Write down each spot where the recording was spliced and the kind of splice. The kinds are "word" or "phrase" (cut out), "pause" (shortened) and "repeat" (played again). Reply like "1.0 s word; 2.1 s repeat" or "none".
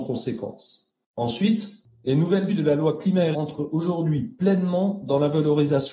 2.5 s phrase; 3.3 s word